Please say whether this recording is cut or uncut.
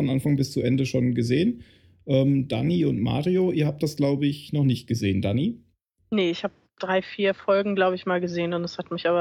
uncut